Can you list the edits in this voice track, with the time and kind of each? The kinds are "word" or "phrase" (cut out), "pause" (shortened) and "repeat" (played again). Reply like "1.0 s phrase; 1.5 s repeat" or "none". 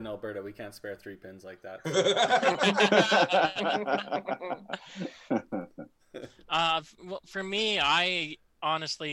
none